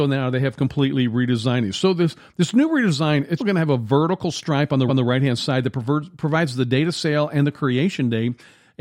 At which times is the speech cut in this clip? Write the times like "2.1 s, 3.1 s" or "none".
3.4 s, 4.9 s